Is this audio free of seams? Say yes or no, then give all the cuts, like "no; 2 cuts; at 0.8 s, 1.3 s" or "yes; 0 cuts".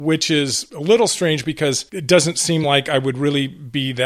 yes; 0 cuts